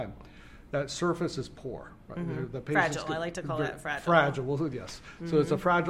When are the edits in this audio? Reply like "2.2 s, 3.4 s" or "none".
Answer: none